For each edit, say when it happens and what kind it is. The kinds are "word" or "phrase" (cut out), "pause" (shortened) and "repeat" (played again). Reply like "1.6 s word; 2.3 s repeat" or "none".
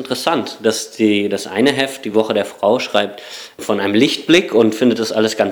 none